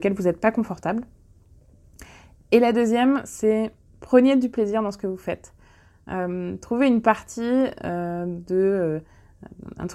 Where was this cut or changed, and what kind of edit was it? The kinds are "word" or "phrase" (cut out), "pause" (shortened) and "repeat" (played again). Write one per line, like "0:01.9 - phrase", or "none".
none